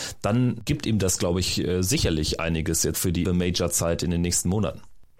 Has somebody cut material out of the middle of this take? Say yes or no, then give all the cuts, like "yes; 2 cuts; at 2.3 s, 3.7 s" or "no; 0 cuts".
yes; 2 cuts; at 2.9 s, 3.2 s